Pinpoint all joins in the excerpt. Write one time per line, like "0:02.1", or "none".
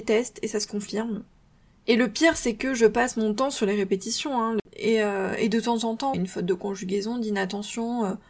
0:06.1